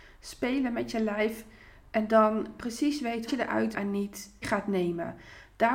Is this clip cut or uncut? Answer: cut